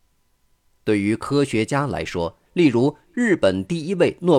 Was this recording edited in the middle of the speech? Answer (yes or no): yes